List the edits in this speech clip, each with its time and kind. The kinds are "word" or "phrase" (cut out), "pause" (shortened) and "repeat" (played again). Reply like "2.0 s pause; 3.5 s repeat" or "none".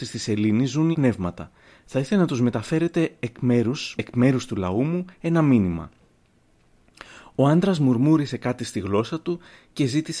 0.9 s word; 3.9 s word